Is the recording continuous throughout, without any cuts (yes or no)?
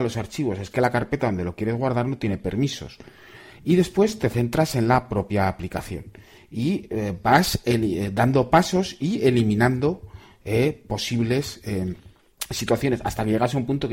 yes